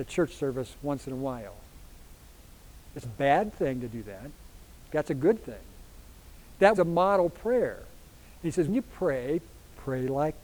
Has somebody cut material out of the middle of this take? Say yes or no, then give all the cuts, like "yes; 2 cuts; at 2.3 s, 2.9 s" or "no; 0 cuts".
yes; 4 cuts; at 3.0 s, 4.9 s, 6.7 s, 8.7 s